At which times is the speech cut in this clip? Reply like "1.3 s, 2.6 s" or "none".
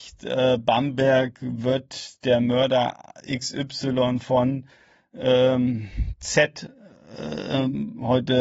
none